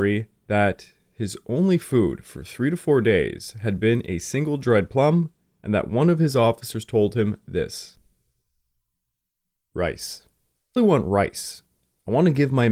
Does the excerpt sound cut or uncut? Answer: cut